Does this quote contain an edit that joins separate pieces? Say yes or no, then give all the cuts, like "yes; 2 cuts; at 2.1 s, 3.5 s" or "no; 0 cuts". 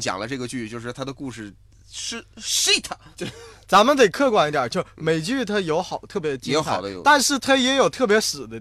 yes; 1 cut; at 3.1 s